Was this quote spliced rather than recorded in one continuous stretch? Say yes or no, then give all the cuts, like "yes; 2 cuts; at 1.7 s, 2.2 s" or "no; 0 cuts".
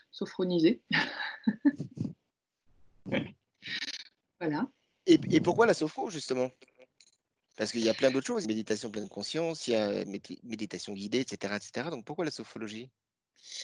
yes; 1 cut; at 8.4 s